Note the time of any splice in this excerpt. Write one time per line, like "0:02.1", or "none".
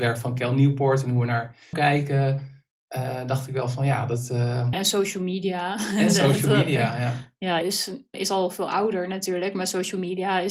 0:01.7
0:04.7
0:07.6
0:08.1